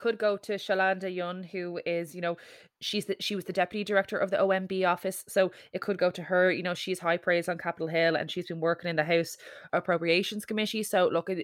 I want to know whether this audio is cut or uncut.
uncut